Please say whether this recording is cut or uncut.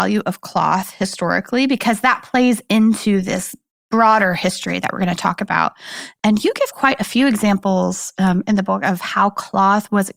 uncut